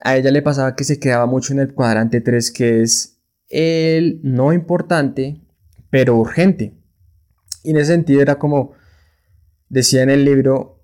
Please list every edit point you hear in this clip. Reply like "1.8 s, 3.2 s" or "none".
none